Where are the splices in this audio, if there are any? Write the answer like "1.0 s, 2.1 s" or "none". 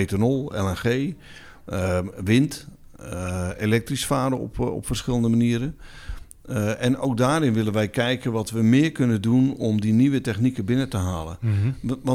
none